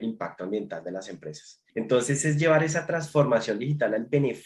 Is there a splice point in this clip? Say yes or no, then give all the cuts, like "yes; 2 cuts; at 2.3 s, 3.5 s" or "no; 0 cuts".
yes; 1 cut; at 1.7 s